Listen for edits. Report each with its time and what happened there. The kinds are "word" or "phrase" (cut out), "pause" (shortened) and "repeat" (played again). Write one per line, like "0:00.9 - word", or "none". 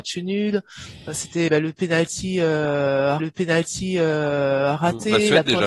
0:01.5 - word
0:03.2 - repeat